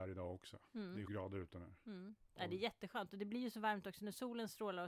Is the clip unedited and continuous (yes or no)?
no